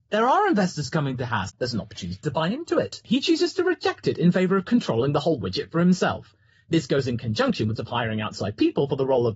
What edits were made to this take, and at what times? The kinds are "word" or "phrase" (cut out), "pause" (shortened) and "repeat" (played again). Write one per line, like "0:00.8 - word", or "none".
0:07.8 - phrase

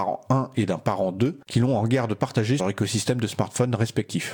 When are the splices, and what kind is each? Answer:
0:02.6 - word

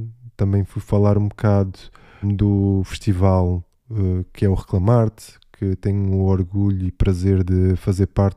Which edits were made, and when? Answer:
0:02.2 - word

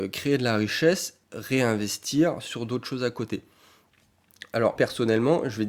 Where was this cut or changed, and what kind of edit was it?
0:01.2 - word
0:04.8 - word

